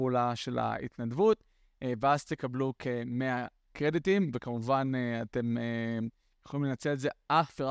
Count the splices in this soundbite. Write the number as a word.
zero